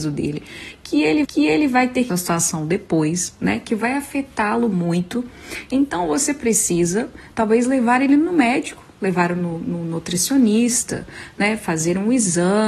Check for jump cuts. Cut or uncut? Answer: cut